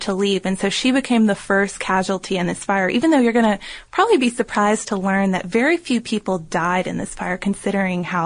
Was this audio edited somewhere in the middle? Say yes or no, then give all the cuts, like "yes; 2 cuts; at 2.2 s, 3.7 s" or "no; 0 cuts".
no; 0 cuts